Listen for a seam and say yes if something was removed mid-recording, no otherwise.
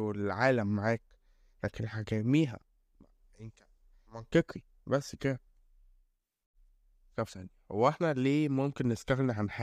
yes